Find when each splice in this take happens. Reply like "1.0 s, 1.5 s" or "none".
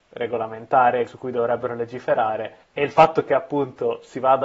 1.1 s, 2.6 s